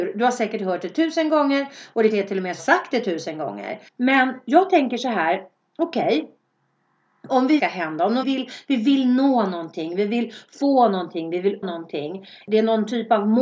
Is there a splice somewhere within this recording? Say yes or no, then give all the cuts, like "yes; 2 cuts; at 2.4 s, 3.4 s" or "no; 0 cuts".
yes; 6 cuts; at 2.1 s, 2.6 s, 3.9 s, 7.6 s, 8.2 s, 11.6 s